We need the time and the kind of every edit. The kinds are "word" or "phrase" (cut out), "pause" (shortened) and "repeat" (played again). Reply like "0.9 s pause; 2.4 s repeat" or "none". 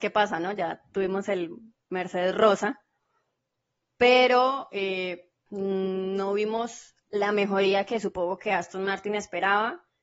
5.5 s word